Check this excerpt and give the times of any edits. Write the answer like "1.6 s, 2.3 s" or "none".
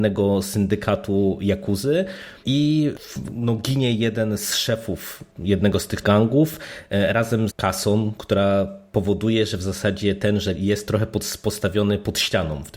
6.0 s, 7.5 s, 10.5 s